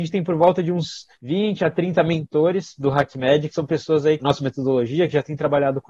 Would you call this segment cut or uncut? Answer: cut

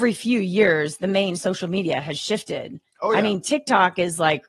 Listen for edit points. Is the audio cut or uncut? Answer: uncut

